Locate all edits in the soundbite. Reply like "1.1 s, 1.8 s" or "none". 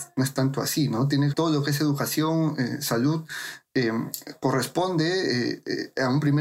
1.3 s